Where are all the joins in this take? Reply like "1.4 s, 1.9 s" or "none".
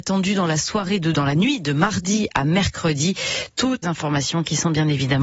1.1 s, 3.8 s